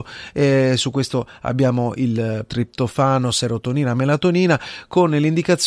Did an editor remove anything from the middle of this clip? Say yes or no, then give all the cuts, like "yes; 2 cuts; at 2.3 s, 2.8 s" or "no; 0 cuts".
yes; 1 cut; at 2.5 s